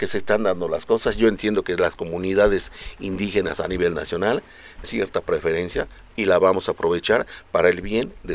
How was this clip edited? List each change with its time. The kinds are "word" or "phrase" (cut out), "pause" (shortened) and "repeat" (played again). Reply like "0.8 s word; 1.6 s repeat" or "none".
4.8 s word